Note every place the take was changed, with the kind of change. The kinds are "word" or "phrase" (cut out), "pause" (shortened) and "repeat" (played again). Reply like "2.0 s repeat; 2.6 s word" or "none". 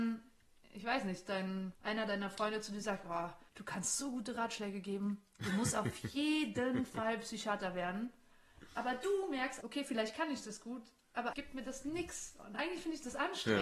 1.8 s pause; 3.5 s pause; 9.6 s word; 11.3 s word